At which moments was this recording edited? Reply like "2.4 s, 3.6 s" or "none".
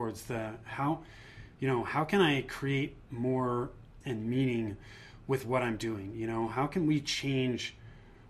4.0 s